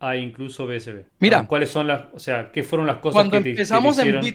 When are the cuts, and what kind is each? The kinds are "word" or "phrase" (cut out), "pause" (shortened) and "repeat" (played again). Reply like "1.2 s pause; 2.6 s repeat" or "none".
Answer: 1.1 s pause